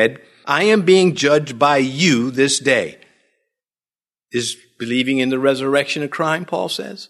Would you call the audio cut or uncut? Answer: uncut